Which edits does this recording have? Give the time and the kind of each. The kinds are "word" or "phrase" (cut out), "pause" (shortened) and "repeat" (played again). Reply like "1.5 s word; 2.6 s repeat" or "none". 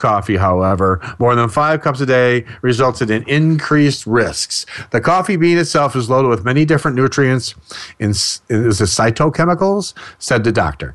none